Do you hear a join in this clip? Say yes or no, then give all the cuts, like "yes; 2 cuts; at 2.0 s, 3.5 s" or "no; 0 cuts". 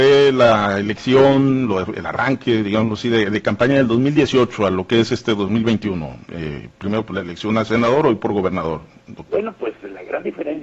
no; 0 cuts